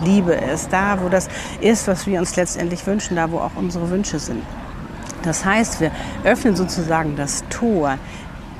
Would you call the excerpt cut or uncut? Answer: uncut